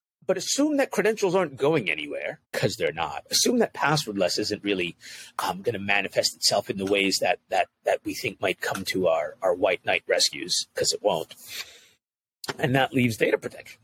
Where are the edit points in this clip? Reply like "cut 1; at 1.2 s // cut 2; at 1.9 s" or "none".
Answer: cut 1; at 2.4 s